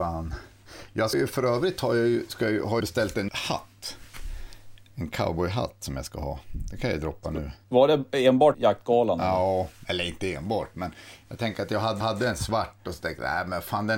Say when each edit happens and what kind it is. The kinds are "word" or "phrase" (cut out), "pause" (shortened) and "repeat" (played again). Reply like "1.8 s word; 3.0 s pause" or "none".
1.1 s word; 2.8 s word; 3.3 s word; 7.6 s pause; 8.5 s word; 12.0 s repeat